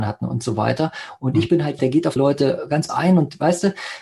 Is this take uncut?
no; 3 cuts; at 1.8 s, 2.2 s, 2.9 s

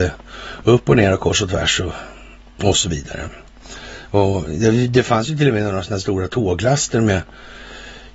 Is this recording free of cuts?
yes; 0 cuts

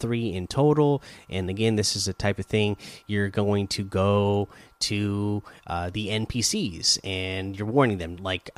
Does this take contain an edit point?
no; 0 cuts

